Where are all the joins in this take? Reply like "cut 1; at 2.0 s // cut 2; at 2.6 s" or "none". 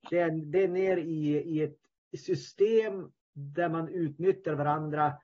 cut 1; at 3.2 s